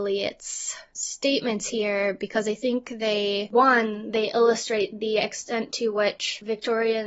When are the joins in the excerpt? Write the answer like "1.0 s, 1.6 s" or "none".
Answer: 0.9 s